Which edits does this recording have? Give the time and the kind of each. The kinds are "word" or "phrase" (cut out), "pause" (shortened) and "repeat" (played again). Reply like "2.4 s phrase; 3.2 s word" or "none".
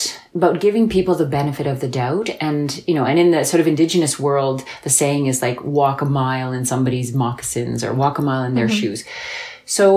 none